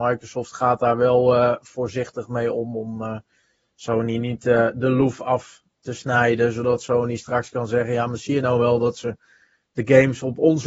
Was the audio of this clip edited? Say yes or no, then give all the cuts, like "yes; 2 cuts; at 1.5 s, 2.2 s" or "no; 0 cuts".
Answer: no; 0 cuts